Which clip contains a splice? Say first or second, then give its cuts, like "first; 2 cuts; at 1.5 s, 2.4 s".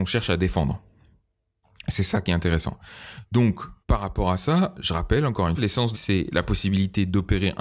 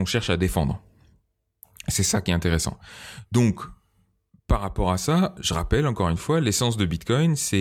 first; 3 cuts; at 3.8 s, 5.6 s, 5.9 s